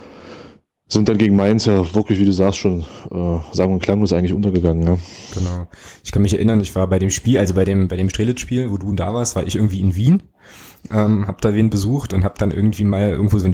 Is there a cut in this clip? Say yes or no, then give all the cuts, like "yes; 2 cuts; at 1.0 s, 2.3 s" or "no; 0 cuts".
no; 0 cuts